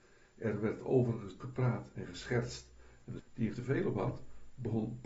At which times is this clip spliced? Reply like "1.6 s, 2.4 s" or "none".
1.4 s, 3.2 s, 3.5 s